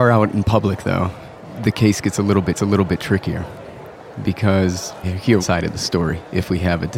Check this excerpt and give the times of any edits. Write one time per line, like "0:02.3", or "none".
0:02.5
0:05.0
0:05.4